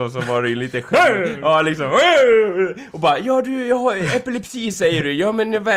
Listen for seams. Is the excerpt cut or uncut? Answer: uncut